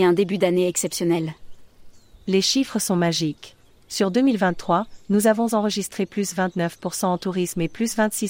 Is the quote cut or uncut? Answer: uncut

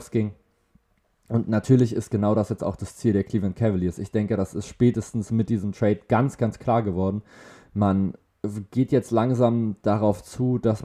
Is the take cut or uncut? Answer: uncut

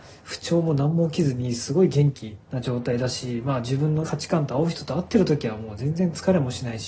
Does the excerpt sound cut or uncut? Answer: cut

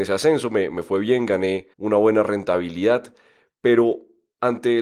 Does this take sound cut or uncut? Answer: cut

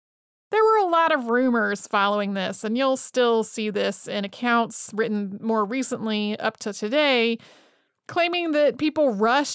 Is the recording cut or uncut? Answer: uncut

